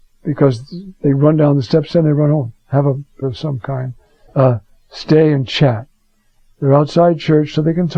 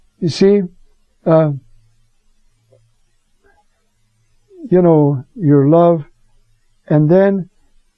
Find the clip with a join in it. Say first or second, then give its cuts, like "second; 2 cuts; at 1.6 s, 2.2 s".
first; 3 cuts; at 2.6 s, 3.2 s, 4.3 s